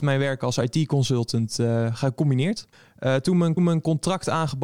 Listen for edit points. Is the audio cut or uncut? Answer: cut